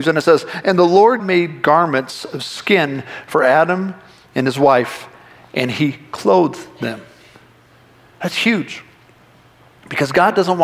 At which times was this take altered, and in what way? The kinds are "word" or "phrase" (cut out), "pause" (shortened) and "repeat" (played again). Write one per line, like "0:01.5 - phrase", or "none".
0:01.2 - word